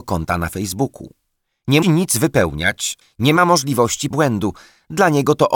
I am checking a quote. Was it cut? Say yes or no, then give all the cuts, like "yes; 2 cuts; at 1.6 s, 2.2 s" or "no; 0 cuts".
yes; 3 cuts; at 1.8 s, 3.0 s, 4.1 s